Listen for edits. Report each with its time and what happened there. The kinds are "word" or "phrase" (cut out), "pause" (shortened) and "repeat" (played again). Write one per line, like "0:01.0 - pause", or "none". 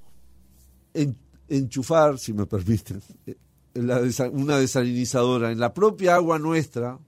none